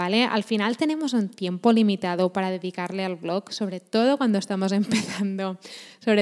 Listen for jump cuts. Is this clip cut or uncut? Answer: uncut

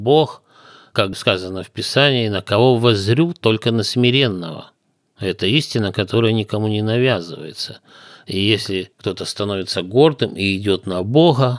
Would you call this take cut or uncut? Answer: uncut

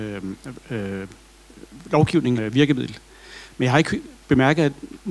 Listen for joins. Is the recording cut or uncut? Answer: cut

